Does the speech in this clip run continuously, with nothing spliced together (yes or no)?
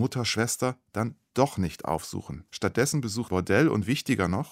no